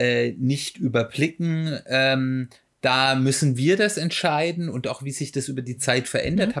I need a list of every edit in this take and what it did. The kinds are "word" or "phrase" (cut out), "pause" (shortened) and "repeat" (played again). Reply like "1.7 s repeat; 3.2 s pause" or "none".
none